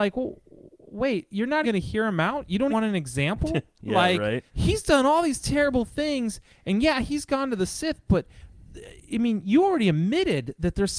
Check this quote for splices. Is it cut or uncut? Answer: cut